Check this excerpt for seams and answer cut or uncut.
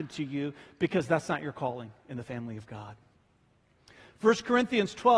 uncut